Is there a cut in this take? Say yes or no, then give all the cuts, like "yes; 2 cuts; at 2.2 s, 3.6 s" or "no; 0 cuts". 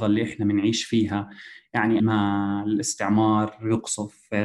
yes; 1 cut; at 2.0 s